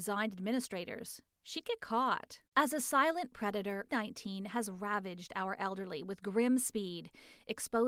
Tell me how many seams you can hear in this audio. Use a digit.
2